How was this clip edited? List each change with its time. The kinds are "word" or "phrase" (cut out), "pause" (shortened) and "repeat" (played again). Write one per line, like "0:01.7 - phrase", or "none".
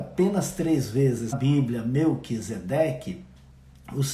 0:01.3 - word